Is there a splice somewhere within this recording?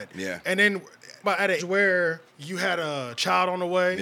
yes; 3 cuts; at 1.2 s, 1.6 s, 2.3 s

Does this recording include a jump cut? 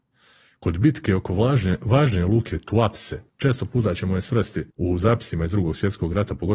yes; 2 cuts; at 3.3 s, 4.7 s

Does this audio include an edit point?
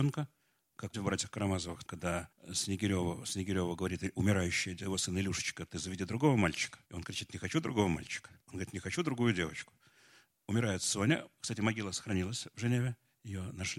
yes; 5 cuts; at 0.9 s, 1.8 s, 2.3 s, 6.8 s, 8.4 s

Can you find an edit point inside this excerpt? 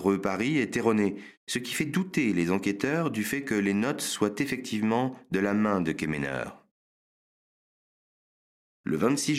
no; 0 cuts

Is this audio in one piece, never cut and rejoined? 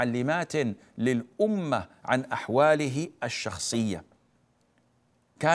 yes; 0 cuts

